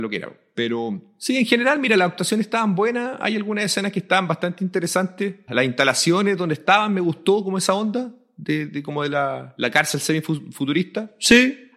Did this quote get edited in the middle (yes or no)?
no